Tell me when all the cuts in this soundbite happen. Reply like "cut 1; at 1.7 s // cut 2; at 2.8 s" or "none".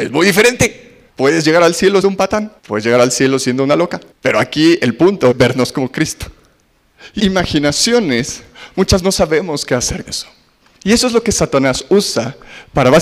cut 1; at 1.1 s // cut 2; at 2.0 s // cut 3; at 2.6 s // cut 4; at 4.1 s // cut 5; at 5.3 s // cut 6; at 7.2 s // cut 7; at 9.0 s // cut 8; at 10.1 s